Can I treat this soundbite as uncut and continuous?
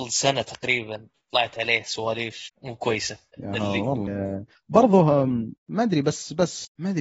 no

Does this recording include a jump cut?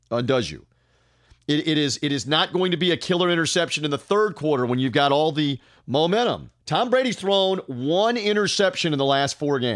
yes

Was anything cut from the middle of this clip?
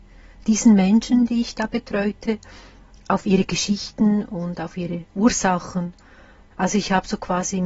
yes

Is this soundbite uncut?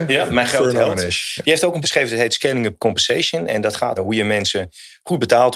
no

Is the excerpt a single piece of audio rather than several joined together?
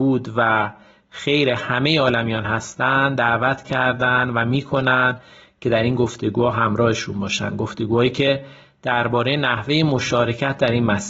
yes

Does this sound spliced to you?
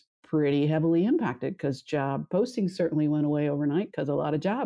no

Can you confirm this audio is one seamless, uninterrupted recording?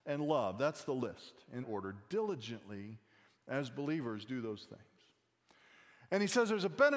no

